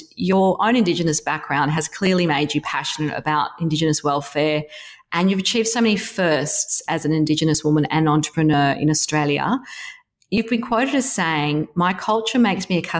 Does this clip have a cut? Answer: no; 0 cuts

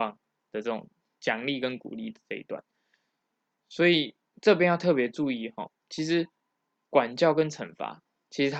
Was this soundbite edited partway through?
no; 0 cuts

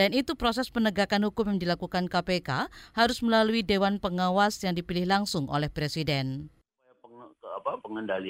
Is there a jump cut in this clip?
no; 0 cuts

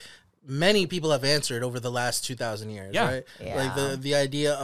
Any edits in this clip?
no; 0 cuts

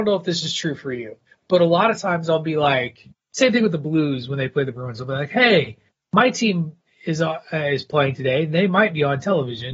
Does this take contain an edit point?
no; 0 cuts

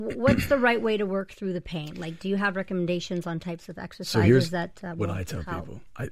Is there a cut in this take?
no; 0 cuts

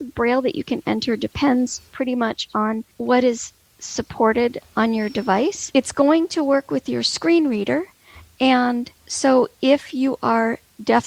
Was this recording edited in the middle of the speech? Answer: yes; 2 cuts; at 2.9 s, 9.0 s

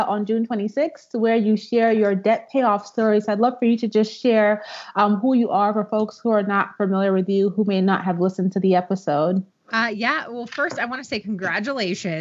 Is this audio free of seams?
no; 1 cut; at 9.5 s

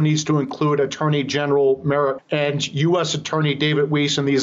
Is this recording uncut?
no; 1 cut; at 2.2 s

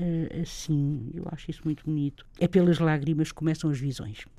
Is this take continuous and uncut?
no; 1 cut; at 2.3 s

